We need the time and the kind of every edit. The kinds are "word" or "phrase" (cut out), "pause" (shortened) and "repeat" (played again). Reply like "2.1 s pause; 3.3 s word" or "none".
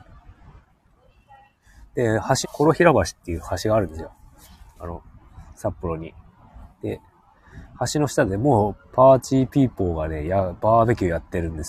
2.4 s phrase; 8.8 s pause